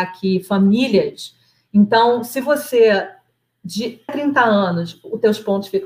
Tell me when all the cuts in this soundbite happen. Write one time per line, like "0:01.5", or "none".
0:04.1